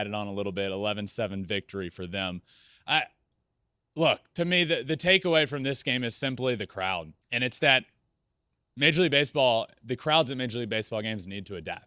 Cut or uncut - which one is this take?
cut